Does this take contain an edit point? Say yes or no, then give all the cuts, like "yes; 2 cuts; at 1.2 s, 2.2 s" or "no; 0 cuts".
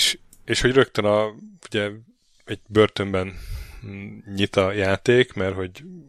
no; 0 cuts